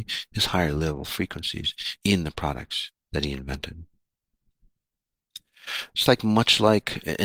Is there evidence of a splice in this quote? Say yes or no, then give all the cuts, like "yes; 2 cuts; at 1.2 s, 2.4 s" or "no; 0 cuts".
yes; 2 cuts; at 2.0 s, 3.0 s